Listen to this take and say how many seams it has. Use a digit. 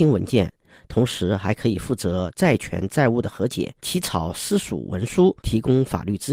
2